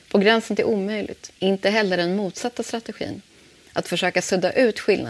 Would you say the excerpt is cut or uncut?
cut